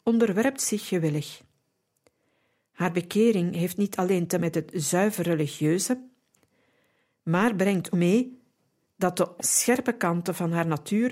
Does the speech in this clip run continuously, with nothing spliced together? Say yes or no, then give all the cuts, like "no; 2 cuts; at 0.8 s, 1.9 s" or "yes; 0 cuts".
no; 3 cuts; at 4.4 s, 7.9 s, 9.4 s